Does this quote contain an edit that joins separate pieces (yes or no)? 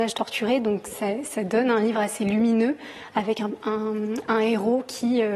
no